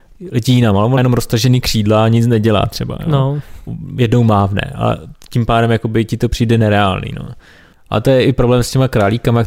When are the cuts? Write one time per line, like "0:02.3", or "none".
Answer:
0:01.0